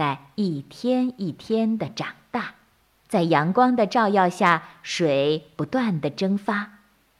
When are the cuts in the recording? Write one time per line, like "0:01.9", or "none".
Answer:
0:02.9

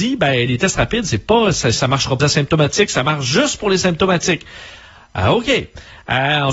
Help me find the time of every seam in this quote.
0:02.2

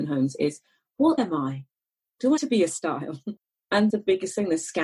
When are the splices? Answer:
0:01.2
0:02.4
0:03.9

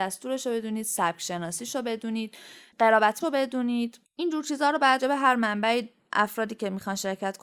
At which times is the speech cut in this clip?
0:03.2
0:04.0
0:05.0

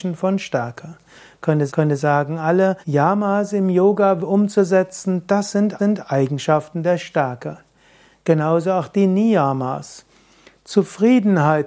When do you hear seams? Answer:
0:01.7
0:02.8
0:05.8

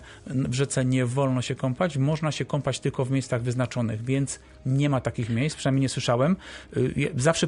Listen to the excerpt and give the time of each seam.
none

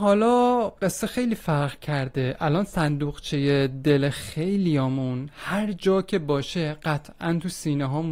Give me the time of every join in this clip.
none

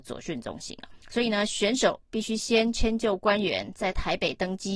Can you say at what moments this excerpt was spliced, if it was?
0:01.0

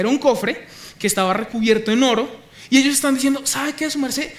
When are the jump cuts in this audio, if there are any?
none

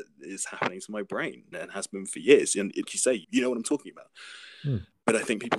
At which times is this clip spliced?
0:01.5
0:02.9
0:03.2

